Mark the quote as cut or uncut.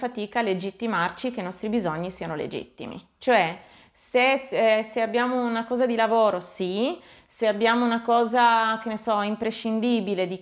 uncut